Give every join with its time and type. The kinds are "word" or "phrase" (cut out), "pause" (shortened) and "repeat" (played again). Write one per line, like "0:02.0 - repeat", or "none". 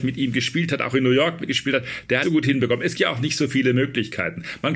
0:01.5 - word
0:02.2 - phrase
0:02.9 - word